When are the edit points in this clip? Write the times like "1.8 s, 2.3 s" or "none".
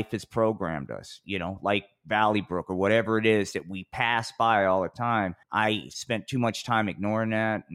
5.4 s